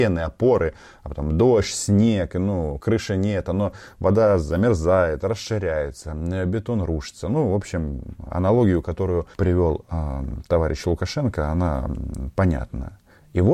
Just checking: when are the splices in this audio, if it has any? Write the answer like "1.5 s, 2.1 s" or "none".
9.3 s